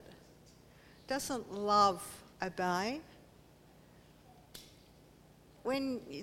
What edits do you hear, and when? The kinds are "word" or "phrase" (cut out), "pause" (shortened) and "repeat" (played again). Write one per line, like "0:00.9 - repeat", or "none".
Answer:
0:02.3 - pause